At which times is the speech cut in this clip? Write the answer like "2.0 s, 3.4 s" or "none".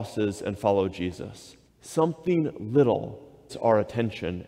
1.7 s, 3.5 s